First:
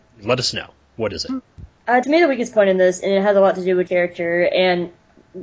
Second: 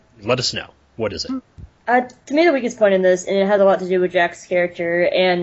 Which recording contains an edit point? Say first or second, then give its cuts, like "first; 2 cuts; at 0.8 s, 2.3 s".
first; 2 cuts; at 2.0 s, 3.9 s